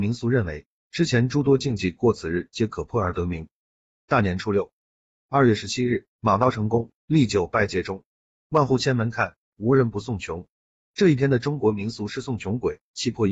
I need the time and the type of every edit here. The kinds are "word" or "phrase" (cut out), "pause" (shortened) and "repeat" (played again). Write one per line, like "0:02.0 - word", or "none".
0:06.1 - pause
0:07.0 - pause